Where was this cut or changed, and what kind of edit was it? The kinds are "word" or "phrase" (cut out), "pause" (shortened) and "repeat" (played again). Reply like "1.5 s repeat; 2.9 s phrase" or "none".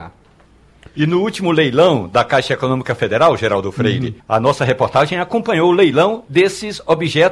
4.2 s pause